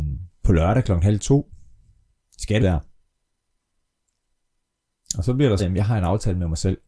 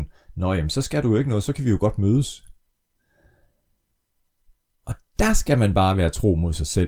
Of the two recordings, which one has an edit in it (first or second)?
first